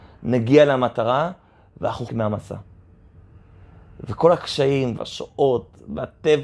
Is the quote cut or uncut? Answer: cut